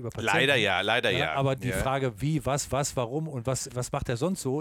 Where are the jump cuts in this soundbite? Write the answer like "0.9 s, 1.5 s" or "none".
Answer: 1.6 s, 2.7 s, 3.7 s